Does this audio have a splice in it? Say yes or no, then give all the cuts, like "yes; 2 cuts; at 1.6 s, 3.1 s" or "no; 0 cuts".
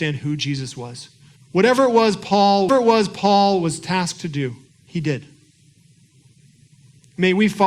yes; 3 cuts; at 1.4 s, 2.7 s, 4.7 s